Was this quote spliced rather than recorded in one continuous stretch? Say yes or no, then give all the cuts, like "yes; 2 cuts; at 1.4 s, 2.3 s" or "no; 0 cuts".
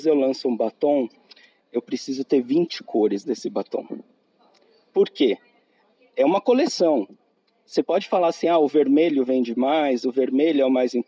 no; 0 cuts